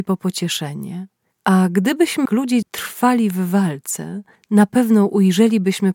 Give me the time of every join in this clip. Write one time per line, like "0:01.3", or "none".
0:02.3
0:02.6
0:04.4